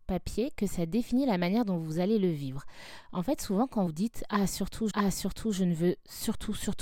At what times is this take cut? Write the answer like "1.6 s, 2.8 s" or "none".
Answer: 3.9 s, 4.9 s